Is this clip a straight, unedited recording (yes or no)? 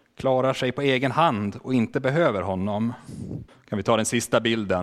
no